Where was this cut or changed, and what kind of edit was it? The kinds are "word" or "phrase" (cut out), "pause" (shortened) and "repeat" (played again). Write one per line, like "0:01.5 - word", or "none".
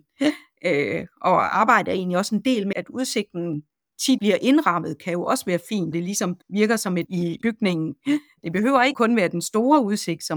0:02.7 - word
0:04.2 - word
0:05.9 - word
0:06.4 - pause
0:07.1 - word
0:07.4 - word
0:08.9 - word